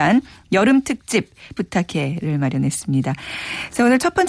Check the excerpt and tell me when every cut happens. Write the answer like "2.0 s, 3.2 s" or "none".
1.6 s